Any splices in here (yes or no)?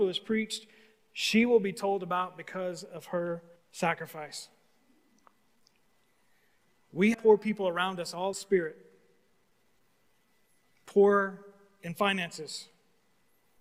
yes